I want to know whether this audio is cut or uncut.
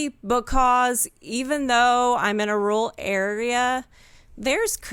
uncut